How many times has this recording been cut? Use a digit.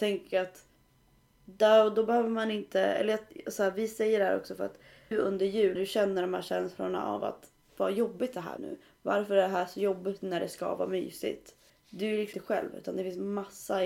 5